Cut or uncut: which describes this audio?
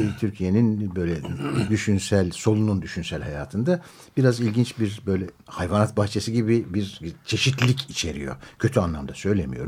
uncut